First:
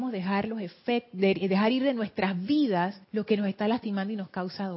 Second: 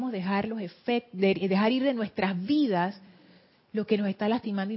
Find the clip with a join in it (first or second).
first